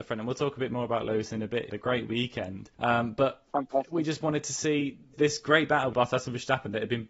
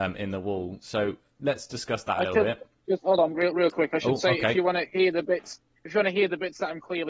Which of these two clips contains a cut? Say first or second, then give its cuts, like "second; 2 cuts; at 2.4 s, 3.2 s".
first; 4 cuts; at 1.7 s, 2.7 s, 5.1 s, 5.9 s